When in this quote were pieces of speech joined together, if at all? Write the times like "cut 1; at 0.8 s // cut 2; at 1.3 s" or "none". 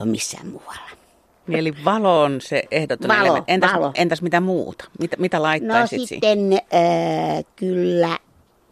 none